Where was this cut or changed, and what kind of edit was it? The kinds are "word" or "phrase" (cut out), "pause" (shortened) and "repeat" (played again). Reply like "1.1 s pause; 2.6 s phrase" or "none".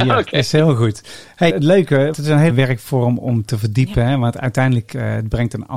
1.5 s word; 2.1 s word; 2.5 s word